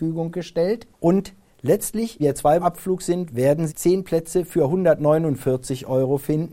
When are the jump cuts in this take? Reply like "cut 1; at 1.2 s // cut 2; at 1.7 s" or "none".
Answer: cut 1; at 0.9 s // cut 2; at 2.2 s // cut 3; at 2.6 s // cut 4; at 3.7 s